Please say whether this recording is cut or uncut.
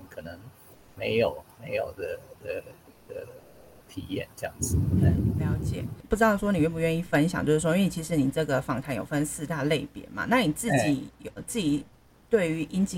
cut